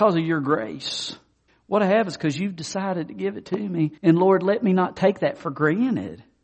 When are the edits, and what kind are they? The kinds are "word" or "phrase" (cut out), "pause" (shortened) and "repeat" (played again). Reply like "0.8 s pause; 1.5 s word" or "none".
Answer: 1.5 s pause; 4.0 s pause